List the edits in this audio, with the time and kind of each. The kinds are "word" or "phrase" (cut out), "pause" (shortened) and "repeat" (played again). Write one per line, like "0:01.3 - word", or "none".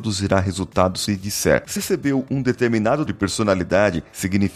0:01.1 - phrase
0:01.8 - word
0:03.1 - word